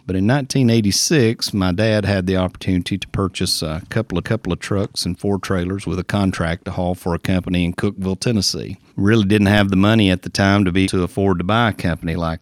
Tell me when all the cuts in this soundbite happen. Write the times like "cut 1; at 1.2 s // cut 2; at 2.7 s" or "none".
cut 1; at 4.2 s // cut 2; at 10.8 s